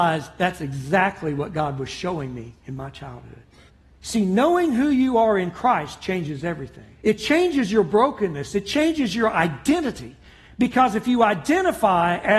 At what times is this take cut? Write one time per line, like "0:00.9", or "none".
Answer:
0:02.6
0:03.7
0:06.9